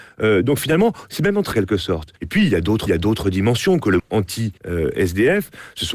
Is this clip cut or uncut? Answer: cut